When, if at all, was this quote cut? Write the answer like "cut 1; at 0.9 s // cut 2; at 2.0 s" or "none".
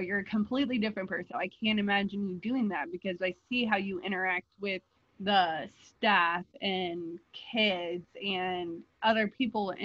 cut 1; at 5.0 s